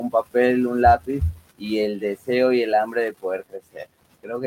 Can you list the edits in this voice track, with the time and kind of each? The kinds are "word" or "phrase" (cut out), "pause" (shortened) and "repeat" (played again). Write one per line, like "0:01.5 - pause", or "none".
none